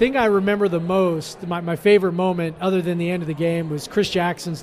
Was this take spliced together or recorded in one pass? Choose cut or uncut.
uncut